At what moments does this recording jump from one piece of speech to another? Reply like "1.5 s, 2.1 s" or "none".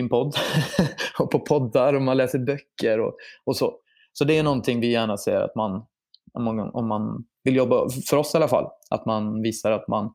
none